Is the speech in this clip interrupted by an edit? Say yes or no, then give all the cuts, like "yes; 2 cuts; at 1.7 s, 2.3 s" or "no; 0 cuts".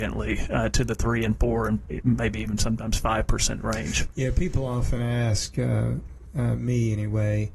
no; 0 cuts